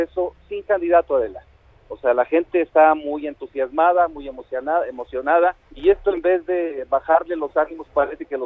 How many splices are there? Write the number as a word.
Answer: two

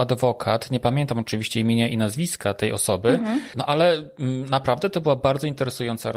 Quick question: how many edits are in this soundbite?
zero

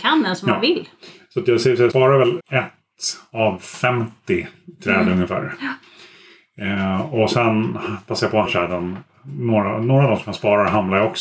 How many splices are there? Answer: three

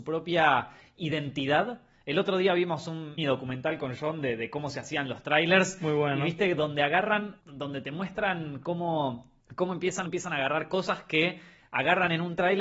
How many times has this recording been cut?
four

